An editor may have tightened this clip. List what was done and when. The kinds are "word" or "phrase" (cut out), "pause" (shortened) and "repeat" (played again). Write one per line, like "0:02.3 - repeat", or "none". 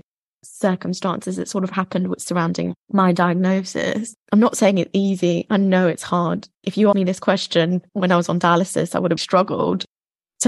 0:02.8 - pause
0:04.2 - pause
0:06.5 - pause
0:06.9 - word
0:07.9 - pause
0:09.2 - word